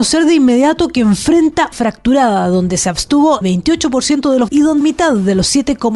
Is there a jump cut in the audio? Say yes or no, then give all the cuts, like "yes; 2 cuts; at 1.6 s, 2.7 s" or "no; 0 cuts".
yes; 4 cuts; at 1.7 s, 3.4 s, 4.5 s, 4.8 s